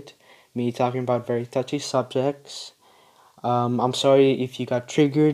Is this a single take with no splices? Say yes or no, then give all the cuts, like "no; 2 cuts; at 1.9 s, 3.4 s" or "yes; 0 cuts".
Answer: yes; 0 cuts